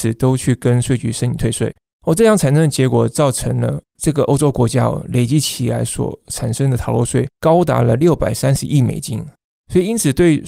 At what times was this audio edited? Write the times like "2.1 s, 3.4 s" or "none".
none